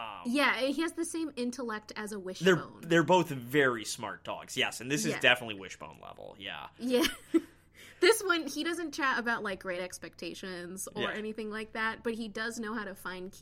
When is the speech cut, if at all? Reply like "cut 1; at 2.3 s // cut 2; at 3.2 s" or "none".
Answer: none